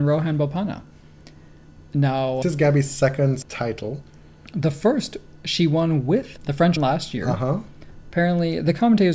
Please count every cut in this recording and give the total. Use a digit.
4